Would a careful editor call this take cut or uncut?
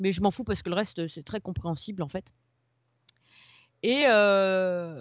uncut